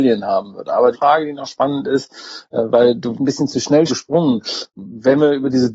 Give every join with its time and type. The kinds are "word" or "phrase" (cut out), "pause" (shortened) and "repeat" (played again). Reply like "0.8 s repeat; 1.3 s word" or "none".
0.9 s phrase; 3.1 s phrase; 3.9 s word